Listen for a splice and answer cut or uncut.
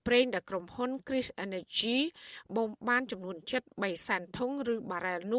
uncut